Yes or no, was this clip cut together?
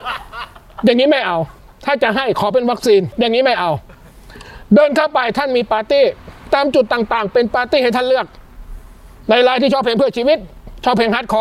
no